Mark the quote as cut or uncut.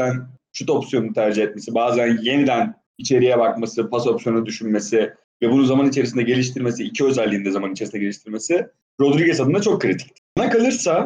uncut